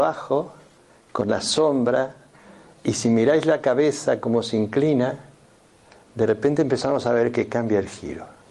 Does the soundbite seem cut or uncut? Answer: uncut